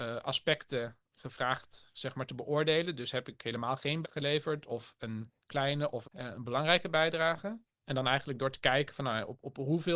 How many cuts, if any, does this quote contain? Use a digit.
2